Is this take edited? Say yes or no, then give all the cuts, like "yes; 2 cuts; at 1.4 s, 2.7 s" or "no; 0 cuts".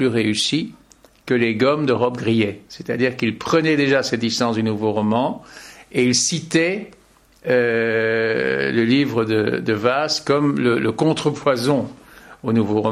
no; 0 cuts